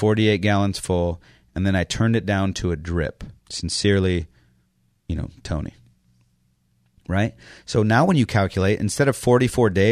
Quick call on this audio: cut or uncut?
cut